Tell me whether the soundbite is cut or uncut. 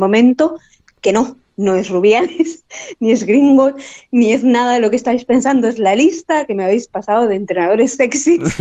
uncut